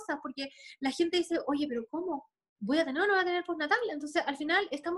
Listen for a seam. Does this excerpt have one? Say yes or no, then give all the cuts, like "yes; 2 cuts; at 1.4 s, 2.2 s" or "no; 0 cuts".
no; 0 cuts